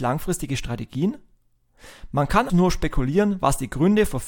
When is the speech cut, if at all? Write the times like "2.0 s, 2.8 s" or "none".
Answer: 2.5 s